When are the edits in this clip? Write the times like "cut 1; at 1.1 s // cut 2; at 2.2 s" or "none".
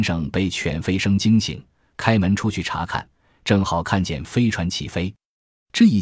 none